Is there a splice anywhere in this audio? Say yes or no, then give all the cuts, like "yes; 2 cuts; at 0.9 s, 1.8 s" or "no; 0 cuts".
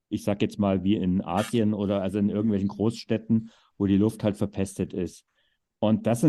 no; 0 cuts